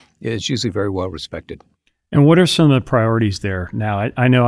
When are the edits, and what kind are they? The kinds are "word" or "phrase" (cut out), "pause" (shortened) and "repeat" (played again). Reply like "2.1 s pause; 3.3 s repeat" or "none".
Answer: 1.7 s pause

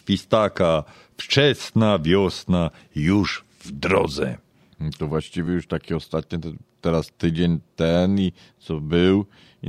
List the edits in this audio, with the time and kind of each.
none

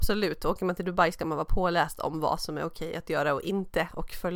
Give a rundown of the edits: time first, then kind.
none

